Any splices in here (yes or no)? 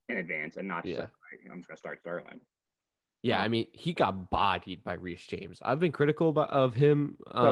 no